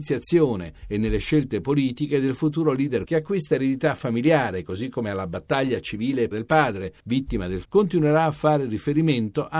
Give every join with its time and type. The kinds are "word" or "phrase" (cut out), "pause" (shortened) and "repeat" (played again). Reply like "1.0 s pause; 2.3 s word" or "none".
3.0 s word; 6.3 s word; 7.6 s word